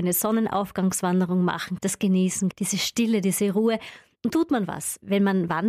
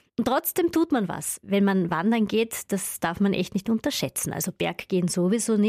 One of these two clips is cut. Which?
first; 3 cuts; at 1.8 s, 2.5 s, 4.3 s

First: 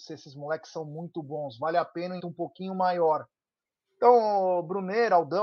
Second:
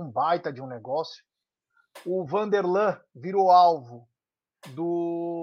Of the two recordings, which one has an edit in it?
first; 1 cut; at 2.2 s

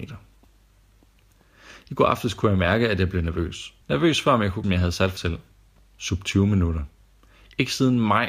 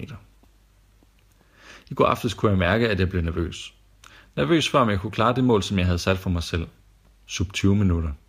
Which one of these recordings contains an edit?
first; 3 cuts; at 3.8 s, 4.6 s, 5.2 s

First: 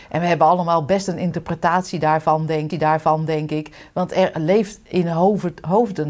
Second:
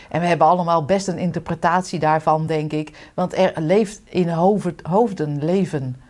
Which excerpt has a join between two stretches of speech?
first; 1 cut; at 2.7 s

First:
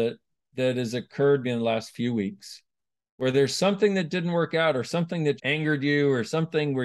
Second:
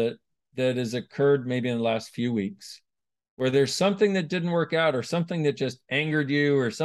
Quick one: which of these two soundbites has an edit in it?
first; 2 cuts; at 1.4 s, 5.4 s

